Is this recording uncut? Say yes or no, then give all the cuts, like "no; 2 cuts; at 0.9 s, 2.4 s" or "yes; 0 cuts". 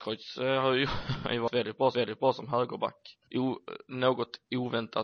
no; 2 cuts; at 1.9 s, 3.2 s